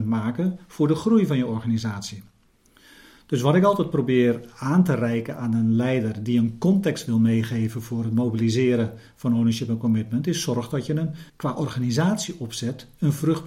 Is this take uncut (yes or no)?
no